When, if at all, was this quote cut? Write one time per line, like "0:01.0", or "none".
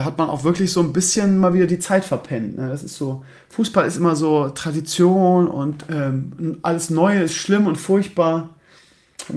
0:05.9